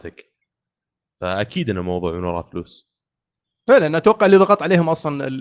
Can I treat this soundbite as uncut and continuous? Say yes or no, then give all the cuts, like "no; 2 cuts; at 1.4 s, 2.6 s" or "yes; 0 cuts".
yes; 0 cuts